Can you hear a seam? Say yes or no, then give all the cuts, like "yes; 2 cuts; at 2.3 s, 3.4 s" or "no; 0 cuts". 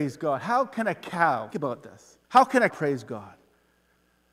yes; 3 cuts; at 1.5 s, 2.2 s, 2.7 s